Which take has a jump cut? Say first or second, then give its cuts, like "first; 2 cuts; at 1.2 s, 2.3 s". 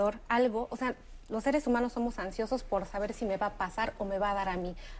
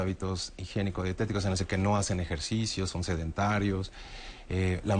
second; 1 cut; at 1.6 s